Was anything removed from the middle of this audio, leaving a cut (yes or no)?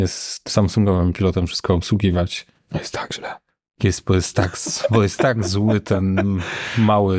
no